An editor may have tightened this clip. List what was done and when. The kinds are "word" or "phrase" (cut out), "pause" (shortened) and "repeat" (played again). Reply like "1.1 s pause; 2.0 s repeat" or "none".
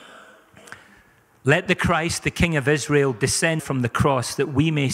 3.6 s word